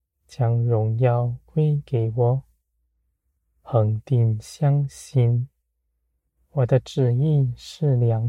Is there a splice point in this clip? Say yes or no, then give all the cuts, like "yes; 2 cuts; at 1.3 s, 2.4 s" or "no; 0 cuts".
no; 0 cuts